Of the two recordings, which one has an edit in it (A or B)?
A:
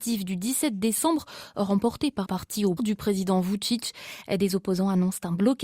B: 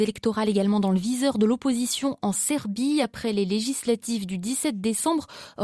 A